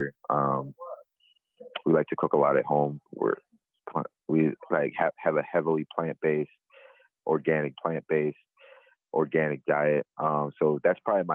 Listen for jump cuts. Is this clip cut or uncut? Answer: cut